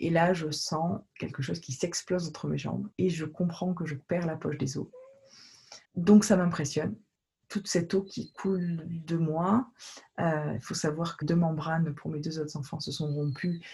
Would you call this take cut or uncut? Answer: cut